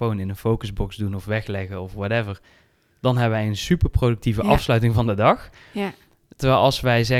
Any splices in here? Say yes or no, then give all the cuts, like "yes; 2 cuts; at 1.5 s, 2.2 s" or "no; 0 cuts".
no; 0 cuts